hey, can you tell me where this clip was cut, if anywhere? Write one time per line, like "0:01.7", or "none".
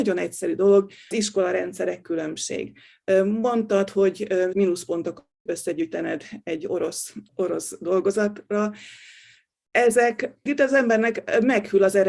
0:01.1
0:02.0
0:04.5
0:05.5
0:07.3
0:10.5